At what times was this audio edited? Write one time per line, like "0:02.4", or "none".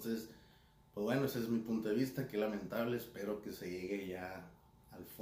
none